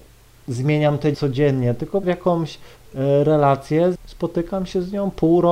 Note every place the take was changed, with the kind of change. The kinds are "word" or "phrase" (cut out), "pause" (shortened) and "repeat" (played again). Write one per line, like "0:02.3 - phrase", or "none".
0:01.1 - word
0:02.0 - phrase
0:03.9 - phrase